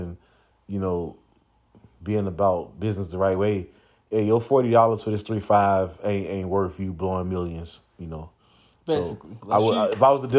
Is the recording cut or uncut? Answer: uncut